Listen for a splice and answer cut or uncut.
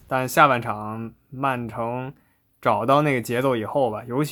uncut